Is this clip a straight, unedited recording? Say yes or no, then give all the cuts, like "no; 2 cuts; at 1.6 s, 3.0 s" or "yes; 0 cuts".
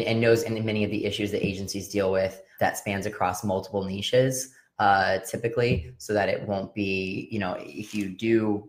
no; 1 cut; at 2.6 s